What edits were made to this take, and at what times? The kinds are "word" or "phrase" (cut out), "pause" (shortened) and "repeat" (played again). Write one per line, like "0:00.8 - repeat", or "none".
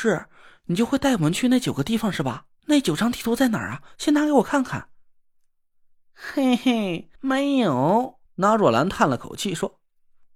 0:02.6 - pause
0:07.1 - pause
0:08.3 - pause